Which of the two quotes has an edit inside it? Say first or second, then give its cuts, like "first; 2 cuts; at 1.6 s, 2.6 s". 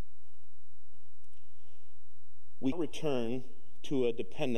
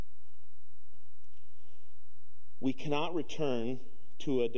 first; 1 cut; at 2.7 s